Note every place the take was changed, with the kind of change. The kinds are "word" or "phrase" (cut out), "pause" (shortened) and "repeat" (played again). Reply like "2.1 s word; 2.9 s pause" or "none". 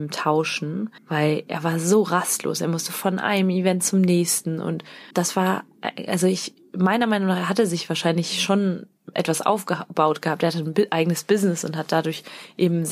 1.0 s pause; 5.1 s pause